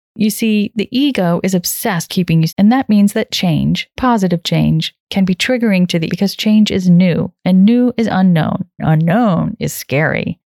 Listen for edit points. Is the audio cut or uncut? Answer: cut